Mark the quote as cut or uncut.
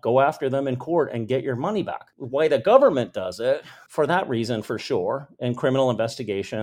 uncut